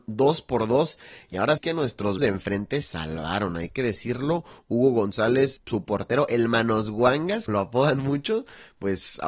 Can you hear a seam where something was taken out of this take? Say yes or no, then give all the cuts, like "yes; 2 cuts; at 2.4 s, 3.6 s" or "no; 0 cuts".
yes; 5 cuts; at 1.6 s, 2.2 s, 2.8 s, 5.6 s, 7.5 s